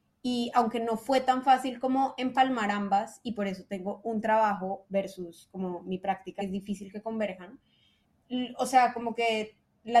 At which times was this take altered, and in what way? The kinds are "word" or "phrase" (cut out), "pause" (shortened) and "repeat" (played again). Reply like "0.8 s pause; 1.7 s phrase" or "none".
3.3 s word; 6.4 s phrase